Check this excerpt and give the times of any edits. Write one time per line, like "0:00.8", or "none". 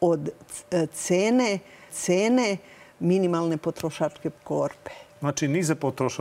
0:01.9
0:04.4